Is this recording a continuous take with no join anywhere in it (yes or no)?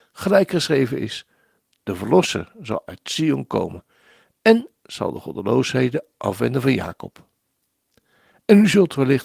yes